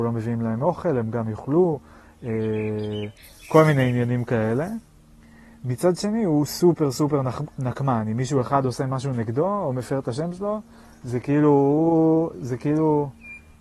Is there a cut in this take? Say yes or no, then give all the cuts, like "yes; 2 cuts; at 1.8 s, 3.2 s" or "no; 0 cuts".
no; 0 cuts